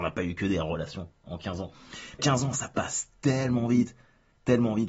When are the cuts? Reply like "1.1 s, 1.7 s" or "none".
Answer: 2.2 s

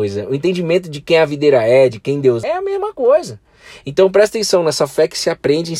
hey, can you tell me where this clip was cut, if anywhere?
2.4 s

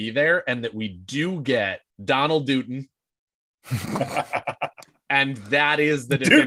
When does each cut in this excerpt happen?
1.9 s

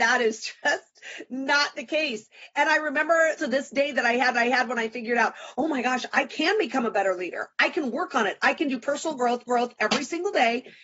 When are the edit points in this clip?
3.4 s, 4.3 s, 9.5 s

